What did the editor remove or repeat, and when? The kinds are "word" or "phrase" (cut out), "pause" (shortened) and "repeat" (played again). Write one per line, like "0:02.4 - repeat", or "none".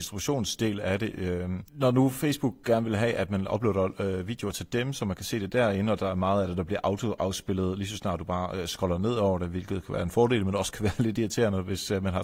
none

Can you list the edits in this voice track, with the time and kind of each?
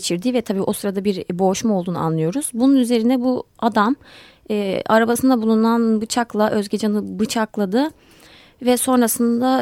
none

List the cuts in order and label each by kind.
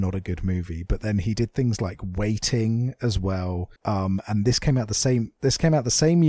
0:03.8 - pause

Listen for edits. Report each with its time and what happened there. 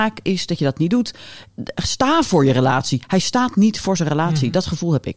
none

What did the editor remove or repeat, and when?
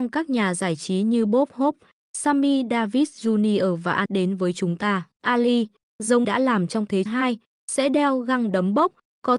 0:04.1 - word
0:05.1 - pause
0:06.2 - phrase
0:07.1 - word

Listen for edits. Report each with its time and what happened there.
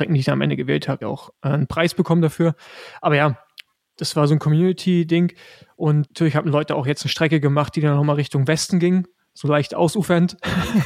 0:01.0 - phrase
0:06.1 - word

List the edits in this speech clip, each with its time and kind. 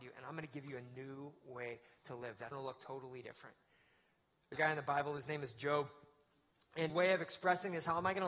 0:02.5 - word
0:04.6 - word
0:06.9 - word

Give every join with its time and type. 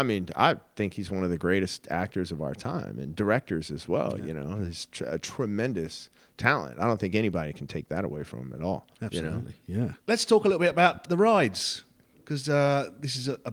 0:08.9 - pause
0:11.0 - word

